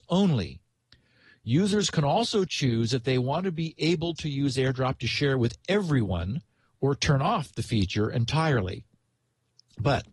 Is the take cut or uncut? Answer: uncut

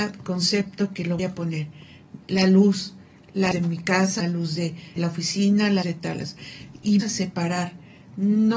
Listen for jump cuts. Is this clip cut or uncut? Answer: cut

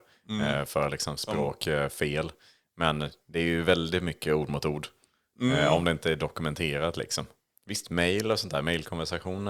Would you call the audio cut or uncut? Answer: uncut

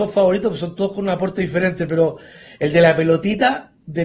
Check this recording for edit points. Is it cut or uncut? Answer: uncut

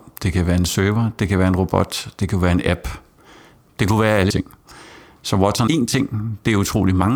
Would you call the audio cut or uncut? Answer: cut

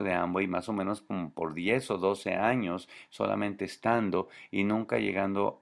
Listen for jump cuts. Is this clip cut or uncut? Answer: uncut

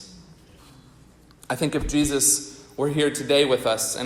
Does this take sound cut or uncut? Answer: uncut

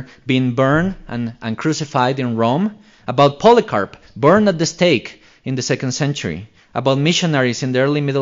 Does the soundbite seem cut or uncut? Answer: uncut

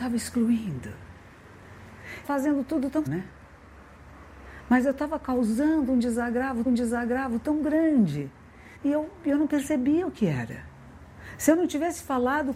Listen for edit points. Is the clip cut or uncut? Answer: cut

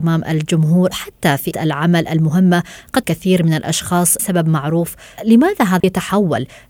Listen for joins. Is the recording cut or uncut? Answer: cut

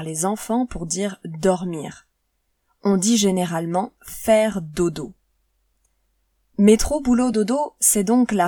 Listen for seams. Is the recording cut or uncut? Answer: uncut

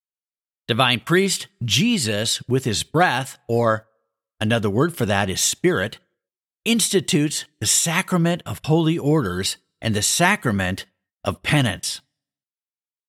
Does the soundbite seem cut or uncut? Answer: uncut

